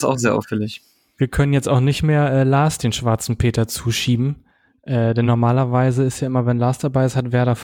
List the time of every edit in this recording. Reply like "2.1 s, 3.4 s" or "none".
none